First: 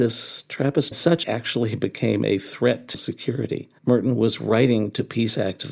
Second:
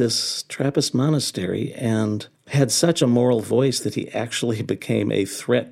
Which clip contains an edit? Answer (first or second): first